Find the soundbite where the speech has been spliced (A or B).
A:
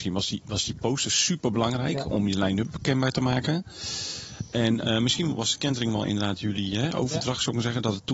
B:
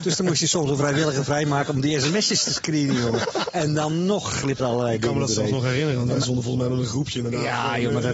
B